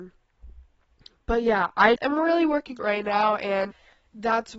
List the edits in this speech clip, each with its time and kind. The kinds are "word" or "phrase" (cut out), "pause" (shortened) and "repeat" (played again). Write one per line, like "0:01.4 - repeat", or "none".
0:02.0 - word
0:02.8 - word